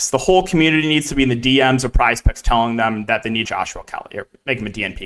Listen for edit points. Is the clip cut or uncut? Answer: cut